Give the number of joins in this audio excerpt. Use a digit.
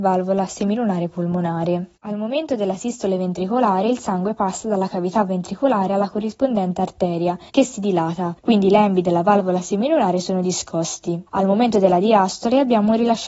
4